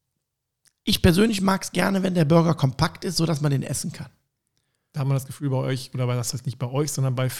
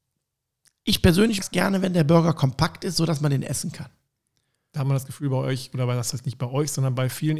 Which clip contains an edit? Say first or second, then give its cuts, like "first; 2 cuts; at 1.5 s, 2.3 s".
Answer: second; 1 cut; at 1.4 s